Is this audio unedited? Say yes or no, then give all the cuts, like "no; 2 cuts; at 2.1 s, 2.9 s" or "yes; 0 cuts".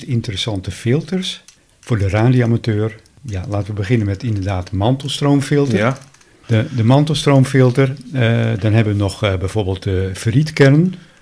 yes; 0 cuts